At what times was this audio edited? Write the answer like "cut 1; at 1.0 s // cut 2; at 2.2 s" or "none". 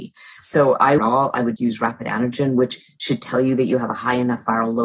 cut 1; at 1.0 s // cut 2; at 1.6 s